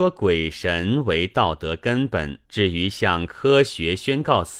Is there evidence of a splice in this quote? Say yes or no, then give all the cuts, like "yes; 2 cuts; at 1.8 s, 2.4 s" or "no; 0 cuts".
yes; 1 cut; at 2.4 s